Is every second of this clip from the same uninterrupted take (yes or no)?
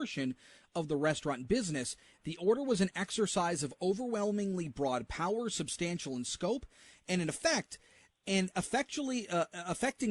yes